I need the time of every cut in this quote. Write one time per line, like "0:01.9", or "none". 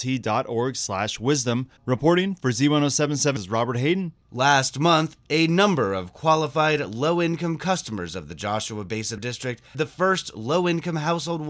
0:01.8
0:03.4
0:04.2
0:09.2
0:09.7